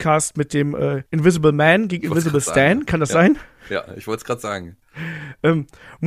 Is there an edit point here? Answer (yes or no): yes